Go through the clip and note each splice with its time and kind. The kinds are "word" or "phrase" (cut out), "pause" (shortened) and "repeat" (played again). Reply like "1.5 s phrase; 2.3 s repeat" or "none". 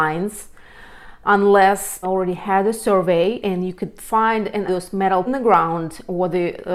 1.2 s word; 2.0 s phrase; 4.7 s word; 5.3 s phrase